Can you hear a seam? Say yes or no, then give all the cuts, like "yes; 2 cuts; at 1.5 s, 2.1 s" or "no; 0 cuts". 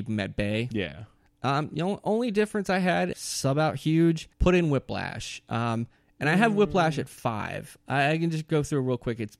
yes; 2 cuts; at 3.1 s, 4.3 s